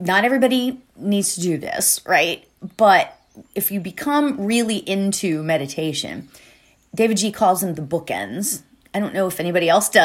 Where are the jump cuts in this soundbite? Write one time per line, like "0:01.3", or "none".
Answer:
none